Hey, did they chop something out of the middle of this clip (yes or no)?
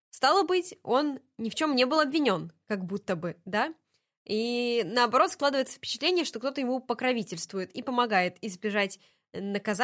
no